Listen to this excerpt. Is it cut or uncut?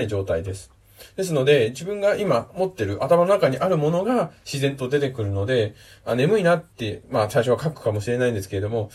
cut